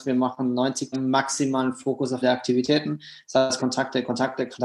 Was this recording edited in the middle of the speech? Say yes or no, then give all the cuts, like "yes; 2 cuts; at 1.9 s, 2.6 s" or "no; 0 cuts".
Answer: yes; 3 cuts; at 0.9 s, 2.2 s, 3.6 s